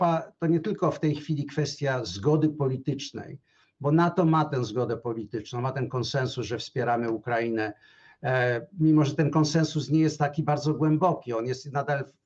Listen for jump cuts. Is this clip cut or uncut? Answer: uncut